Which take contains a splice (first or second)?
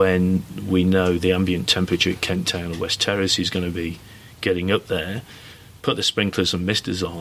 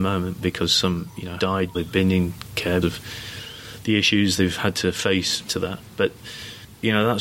second